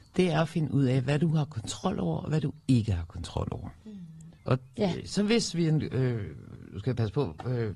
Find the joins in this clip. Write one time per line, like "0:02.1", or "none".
0:04.4